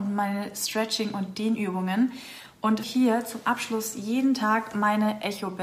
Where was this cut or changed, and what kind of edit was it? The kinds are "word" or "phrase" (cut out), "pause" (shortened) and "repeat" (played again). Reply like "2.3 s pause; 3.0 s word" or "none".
2.8 s word